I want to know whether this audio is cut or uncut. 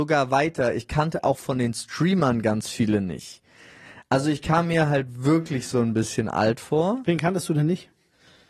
uncut